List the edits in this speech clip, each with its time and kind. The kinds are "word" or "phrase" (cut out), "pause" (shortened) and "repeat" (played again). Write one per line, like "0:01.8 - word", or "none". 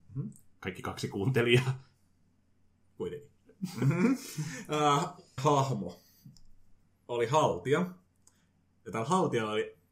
0:05.4 - word